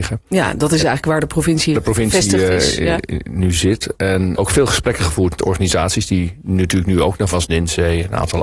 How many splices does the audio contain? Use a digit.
4